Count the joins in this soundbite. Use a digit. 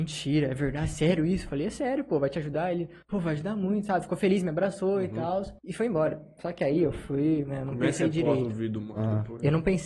2